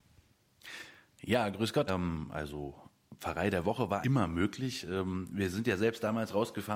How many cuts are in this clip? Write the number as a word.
two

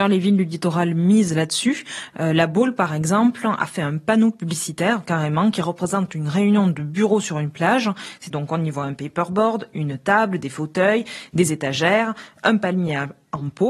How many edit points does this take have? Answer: zero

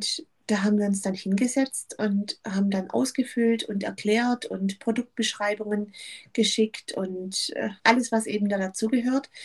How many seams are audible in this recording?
one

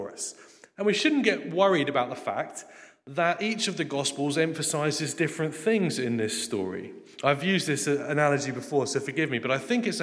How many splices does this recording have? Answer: zero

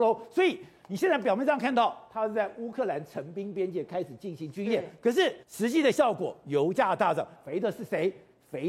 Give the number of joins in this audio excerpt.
two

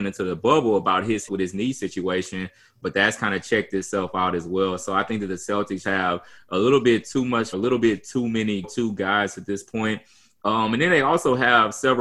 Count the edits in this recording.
four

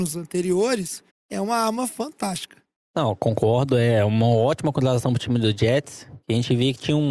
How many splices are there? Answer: one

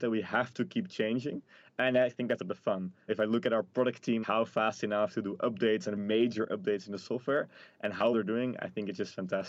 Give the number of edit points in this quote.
five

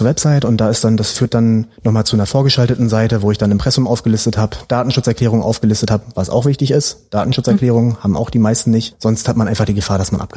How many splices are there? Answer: one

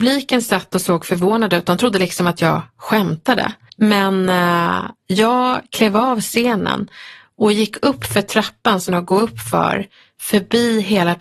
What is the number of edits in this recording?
two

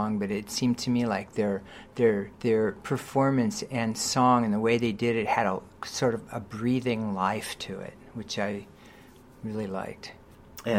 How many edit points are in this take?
one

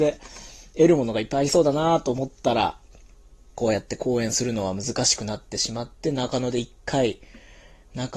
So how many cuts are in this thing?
one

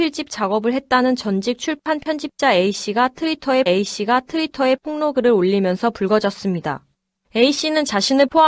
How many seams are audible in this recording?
one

